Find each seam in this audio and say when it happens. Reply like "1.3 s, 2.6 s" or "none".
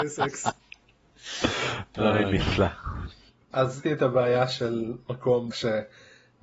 3.8 s, 5.5 s